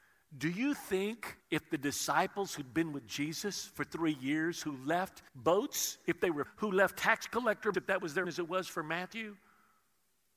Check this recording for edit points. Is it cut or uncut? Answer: cut